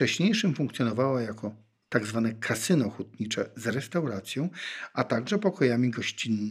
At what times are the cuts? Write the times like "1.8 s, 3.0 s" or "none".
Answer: none